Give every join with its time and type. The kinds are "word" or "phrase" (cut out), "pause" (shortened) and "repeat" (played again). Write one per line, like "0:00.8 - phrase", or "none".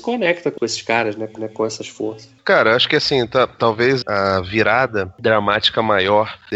0:01.4 - repeat
0:02.4 - pause
0:04.0 - word